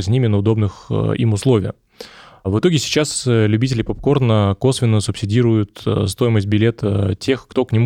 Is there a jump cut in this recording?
no; 0 cuts

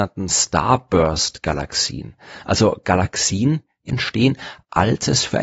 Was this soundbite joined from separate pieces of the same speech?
yes; 1 cut; at 3.9 s

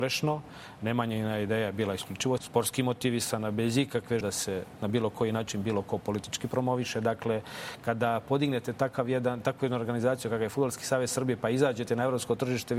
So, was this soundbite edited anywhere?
yes; 2 cuts; at 2.4 s, 4.2 s

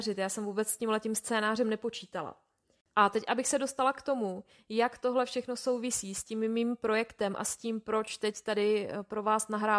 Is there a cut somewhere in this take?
no; 0 cuts

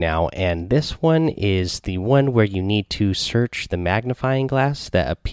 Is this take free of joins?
yes; 0 cuts

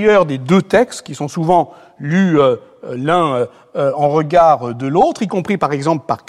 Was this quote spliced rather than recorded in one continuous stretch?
no; 0 cuts

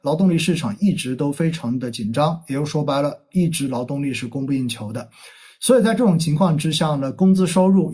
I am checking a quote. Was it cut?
no; 0 cuts

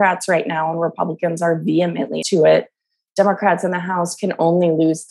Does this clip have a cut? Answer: yes; 1 cut; at 2.2 s

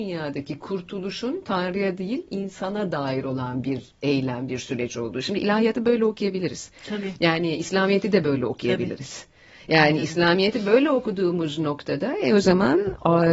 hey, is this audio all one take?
yes; 0 cuts

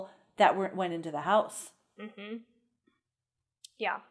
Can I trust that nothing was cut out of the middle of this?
yes; 0 cuts

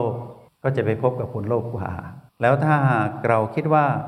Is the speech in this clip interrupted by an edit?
yes; 1 cut; at 2.3 s

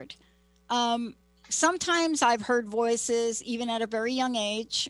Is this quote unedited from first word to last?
no; 1 cut; at 1.2 s

